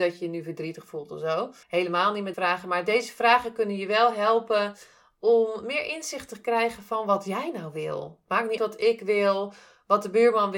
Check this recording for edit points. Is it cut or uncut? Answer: cut